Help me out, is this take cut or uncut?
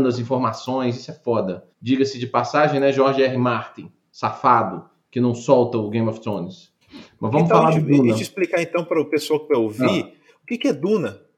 cut